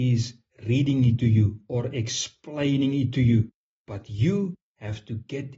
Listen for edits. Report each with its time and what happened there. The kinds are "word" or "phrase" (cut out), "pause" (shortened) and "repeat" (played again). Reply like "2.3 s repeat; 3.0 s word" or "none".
none